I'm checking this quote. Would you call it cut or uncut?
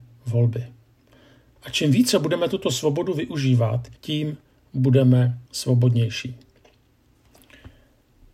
cut